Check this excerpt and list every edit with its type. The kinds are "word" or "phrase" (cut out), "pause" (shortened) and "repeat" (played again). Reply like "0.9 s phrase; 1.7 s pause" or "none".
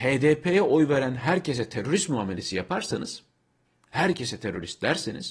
none